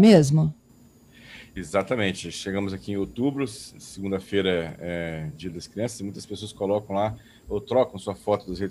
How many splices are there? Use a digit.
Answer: 0